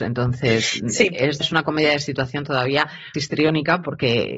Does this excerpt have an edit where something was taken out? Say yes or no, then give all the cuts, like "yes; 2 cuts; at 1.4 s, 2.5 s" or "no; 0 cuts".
yes; 2 cuts; at 1.4 s, 3.1 s